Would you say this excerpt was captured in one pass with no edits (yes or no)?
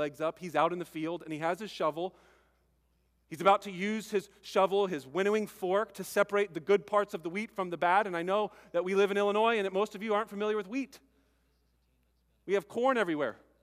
yes